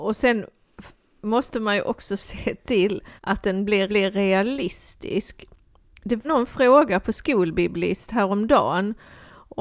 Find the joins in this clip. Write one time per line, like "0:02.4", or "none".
0:03.2
0:03.9
0:06.2